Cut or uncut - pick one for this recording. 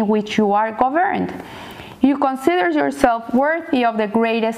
uncut